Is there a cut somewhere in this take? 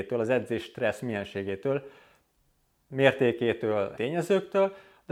yes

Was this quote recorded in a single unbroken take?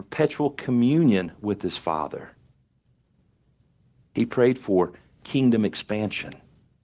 yes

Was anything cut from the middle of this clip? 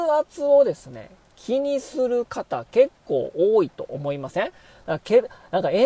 no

